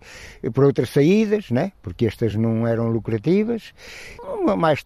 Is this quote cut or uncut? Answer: uncut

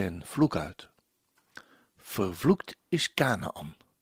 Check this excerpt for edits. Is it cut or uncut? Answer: uncut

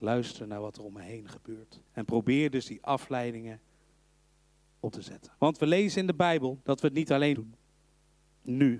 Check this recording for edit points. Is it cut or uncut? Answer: cut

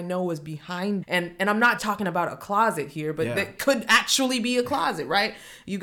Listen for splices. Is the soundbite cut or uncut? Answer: cut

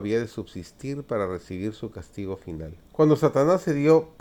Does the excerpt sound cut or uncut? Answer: cut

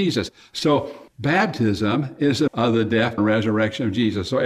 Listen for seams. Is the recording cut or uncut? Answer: cut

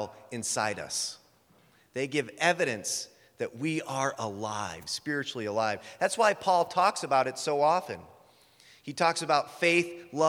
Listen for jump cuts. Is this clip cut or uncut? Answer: uncut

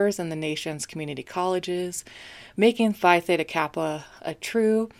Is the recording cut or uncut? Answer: uncut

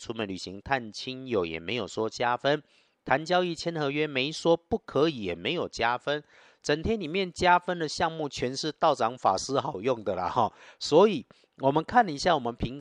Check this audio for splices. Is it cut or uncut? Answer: uncut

